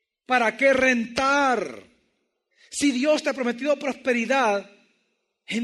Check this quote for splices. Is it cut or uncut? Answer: uncut